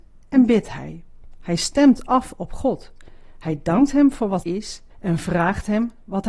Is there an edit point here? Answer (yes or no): yes